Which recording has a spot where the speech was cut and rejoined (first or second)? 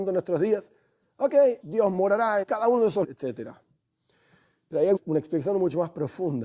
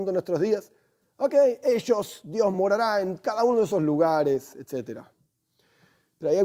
first